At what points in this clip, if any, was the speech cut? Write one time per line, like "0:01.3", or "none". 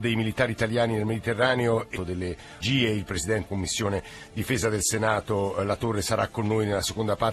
0:02.0
0:02.6
0:03.5